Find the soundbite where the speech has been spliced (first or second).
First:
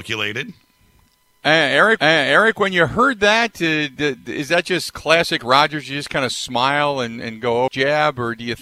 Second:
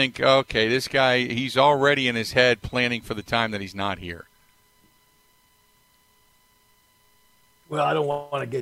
first